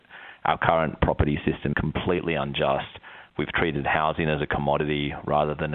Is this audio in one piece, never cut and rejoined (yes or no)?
no